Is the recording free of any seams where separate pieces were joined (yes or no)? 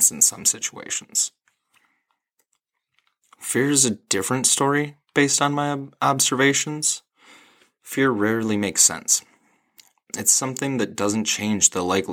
yes